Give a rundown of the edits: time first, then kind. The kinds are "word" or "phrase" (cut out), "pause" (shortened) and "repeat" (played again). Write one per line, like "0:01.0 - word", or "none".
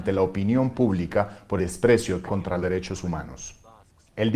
0:01.6 - word
0:02.3 - word
0:02.6 - word